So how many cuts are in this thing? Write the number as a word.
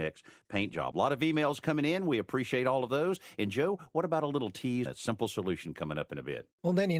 one